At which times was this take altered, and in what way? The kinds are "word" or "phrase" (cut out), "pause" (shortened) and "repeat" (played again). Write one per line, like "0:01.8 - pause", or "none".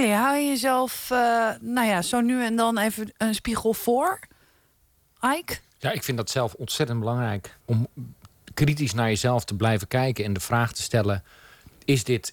0:05.7 - pause
0:07.6 - pause